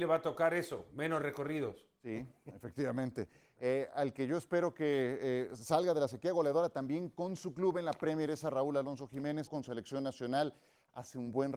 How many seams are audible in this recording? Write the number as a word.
one